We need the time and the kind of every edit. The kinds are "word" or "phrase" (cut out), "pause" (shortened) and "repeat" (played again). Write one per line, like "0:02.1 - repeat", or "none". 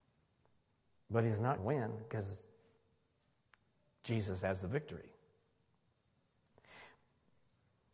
0:01.6 - word